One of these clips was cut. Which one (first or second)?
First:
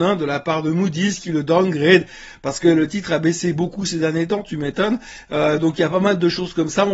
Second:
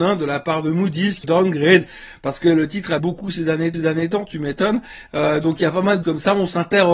second